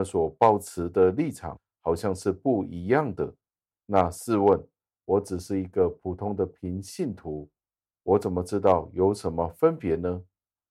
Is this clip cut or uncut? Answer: uncut